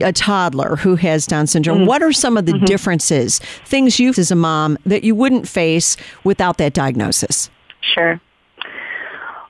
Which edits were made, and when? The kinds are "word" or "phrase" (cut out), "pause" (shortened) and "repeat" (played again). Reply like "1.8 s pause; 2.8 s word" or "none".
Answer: 4.1 s word; 7.6 s pause